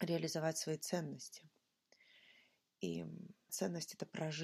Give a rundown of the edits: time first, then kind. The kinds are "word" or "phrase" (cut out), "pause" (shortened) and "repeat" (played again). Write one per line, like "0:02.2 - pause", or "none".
0:03.5 - word